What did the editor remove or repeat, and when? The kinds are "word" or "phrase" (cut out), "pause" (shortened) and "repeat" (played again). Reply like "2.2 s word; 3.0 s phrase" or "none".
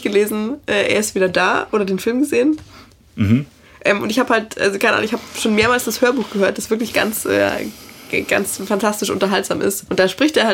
none